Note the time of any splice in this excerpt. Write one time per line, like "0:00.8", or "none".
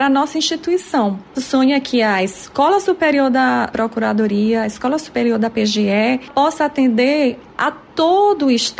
0:01.3
0:06.3

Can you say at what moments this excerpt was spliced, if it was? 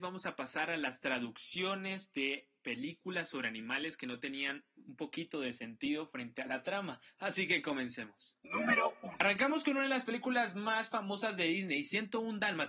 none

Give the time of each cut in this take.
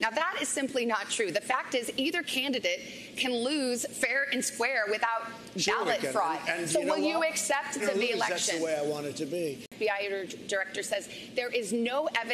0:07.8

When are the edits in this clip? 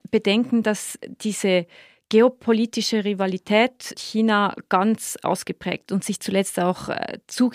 0:03.9
0:05.9

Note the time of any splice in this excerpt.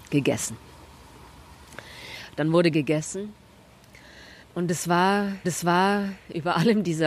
0:02.7
0:04.4
0:05.4

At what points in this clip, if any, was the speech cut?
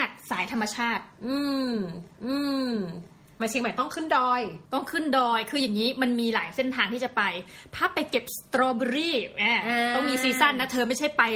0:02.1
0:04.6

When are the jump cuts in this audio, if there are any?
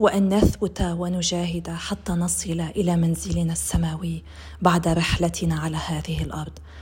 none

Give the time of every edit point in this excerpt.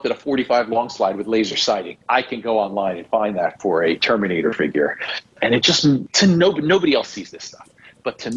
0:02.0

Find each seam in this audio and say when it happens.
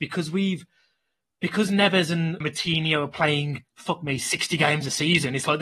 0:02.4
0:03.7

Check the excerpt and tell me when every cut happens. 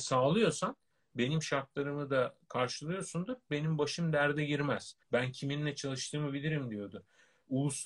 0:05.0

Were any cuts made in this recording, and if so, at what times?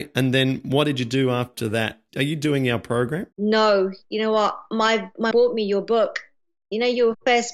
0:03.3
0:05.3

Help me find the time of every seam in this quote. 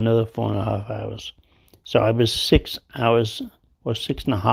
none

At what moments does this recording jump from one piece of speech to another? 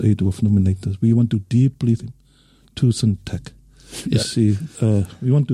0:02.0
0:04.0

